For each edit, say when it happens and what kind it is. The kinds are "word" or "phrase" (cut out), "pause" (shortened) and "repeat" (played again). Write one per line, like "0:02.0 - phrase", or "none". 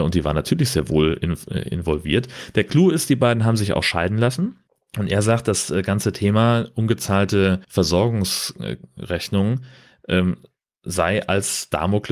0:04.7 - pause
0:07.6 - pause

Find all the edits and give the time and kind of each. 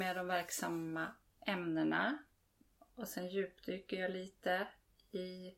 none

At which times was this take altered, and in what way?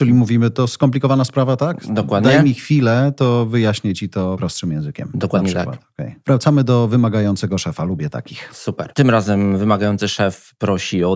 none

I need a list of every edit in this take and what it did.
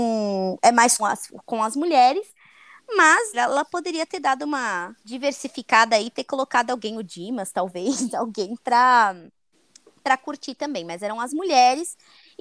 0:01.0 - phrase
0:03.3 - word
0:05.0 - pause

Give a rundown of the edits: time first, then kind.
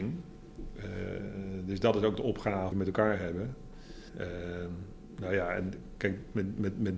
0:02.7 - word
0:04.1 - pause

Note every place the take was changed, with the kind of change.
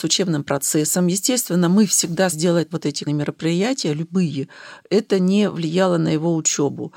0:02.3 - word
0:02.7 - phrase
0:03.1 - word

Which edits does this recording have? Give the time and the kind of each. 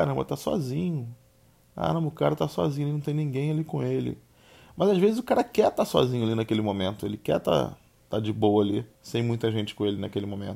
0:08.9 - pause

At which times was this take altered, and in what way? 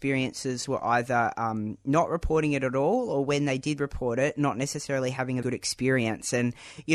0:05.4 - word

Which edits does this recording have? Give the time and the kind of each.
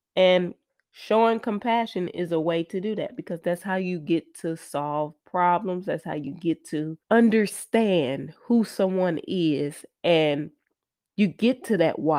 0:07.0 - pause

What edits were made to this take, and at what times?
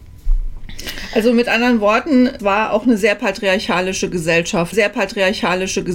0:02.4 - word
0:04.7 - repeat

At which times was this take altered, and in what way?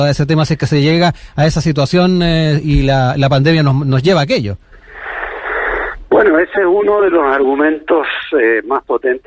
none

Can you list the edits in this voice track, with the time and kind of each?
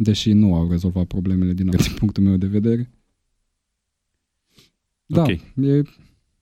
0:01.7 - word

